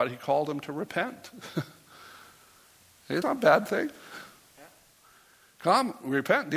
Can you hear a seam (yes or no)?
yes